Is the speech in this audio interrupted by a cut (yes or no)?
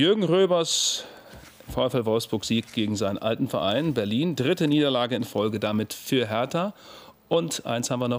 no